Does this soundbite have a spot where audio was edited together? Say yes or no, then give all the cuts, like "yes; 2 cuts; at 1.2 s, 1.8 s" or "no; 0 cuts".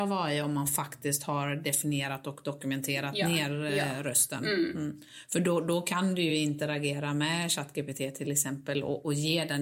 no; 0 cuts